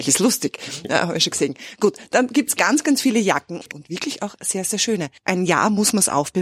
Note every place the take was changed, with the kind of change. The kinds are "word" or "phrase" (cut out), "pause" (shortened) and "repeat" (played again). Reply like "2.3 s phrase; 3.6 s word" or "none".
none